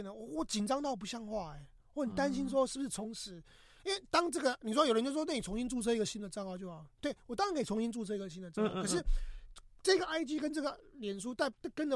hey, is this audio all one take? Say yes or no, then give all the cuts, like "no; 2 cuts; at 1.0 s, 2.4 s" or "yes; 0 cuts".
yes; 0 cuts